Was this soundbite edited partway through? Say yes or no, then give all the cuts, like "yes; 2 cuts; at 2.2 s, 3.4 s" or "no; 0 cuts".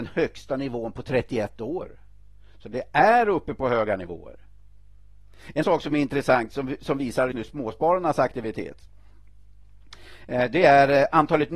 yes; 2 cuts; at 5.6 s, 7.3 s